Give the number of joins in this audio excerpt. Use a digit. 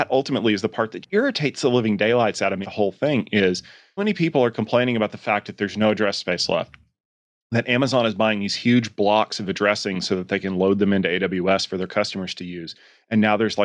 3